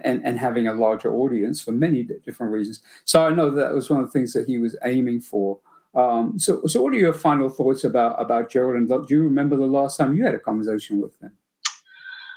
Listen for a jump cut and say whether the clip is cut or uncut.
uncut